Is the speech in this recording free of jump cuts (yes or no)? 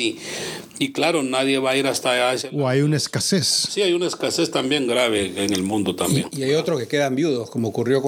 yes